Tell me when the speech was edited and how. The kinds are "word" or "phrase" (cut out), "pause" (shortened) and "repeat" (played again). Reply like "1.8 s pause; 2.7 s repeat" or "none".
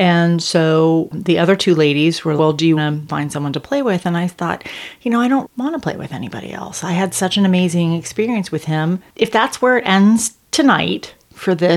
2.4 s word; 2.8 s word; 5.4 s word